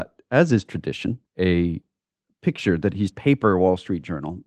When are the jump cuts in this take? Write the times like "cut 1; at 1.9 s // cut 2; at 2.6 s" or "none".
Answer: cut 1; at 1.3 s // cut 2; at 3.1 s